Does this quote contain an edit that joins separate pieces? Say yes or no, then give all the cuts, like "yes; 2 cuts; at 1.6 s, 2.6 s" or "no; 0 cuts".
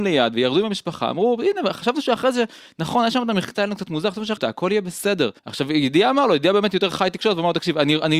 yes; 2 cuts; at 4.4 s, 5.4 s